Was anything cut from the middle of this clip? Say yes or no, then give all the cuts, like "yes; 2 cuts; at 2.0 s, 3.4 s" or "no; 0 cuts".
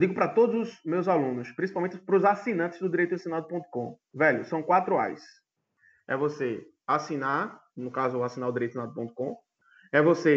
no; 0 cuts